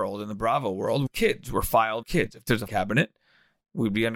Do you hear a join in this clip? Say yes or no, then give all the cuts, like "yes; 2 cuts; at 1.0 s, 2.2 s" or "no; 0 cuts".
yes; 3 cuts; at 1.1 s, 2.0 s, 2.7 s